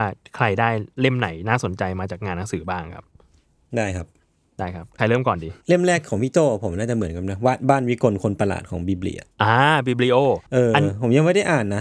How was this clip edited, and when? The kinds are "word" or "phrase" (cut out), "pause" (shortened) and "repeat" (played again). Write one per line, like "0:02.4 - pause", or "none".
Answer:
0:09.3 - pause
0:10.5 - pause

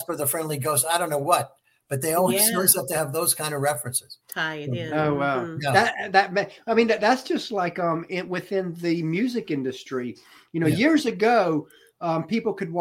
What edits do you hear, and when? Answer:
0:04.2 - pause

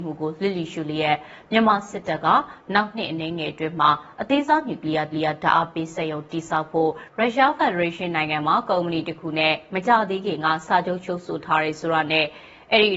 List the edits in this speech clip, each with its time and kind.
0:05.1 - repeat

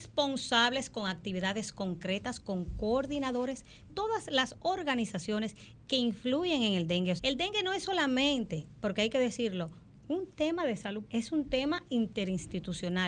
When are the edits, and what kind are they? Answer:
0:03.9 - word
0:07.2 - word
0:11.0 - word

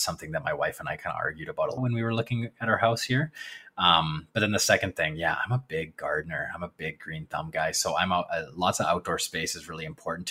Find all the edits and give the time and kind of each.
0:01.8 - word

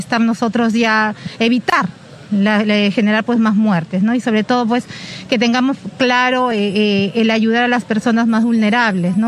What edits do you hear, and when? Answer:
none

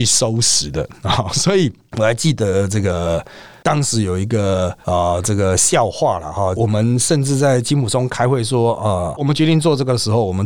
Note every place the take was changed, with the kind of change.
0:09.2 - word

